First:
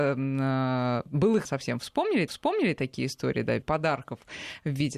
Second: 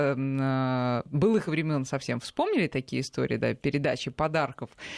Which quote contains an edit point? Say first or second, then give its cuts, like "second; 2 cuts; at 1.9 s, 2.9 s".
first; 3 cuts; at 1.4 s, 2.3 s, 3.6 s